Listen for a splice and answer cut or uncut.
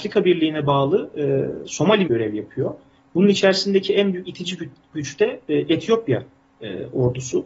cut